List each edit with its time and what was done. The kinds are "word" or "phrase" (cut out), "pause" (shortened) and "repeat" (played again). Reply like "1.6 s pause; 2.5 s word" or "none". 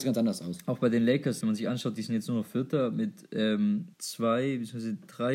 1.4 s word; 3.9 s pause